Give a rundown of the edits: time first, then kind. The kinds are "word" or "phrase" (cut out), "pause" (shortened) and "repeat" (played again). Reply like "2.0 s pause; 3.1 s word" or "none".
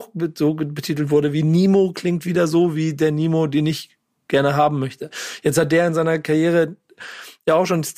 none